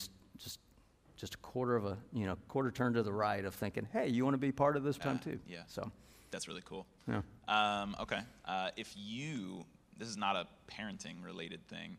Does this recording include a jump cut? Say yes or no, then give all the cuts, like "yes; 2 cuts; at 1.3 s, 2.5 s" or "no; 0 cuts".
yes; 2 cuts; at 2.5 s, 5.0 s